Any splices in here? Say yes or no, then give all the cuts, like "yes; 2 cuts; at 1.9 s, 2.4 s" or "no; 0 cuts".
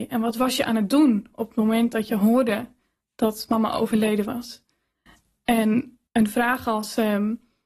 yes; 1 cut; at 6.1 s